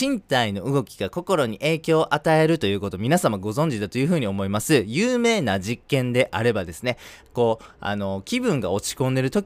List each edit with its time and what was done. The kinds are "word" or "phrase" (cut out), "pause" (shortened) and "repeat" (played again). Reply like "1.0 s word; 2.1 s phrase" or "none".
none